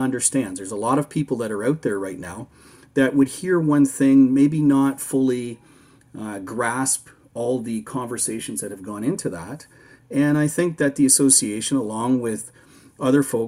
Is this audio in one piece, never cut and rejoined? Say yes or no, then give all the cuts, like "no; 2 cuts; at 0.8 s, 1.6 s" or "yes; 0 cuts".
yes; 0 cuts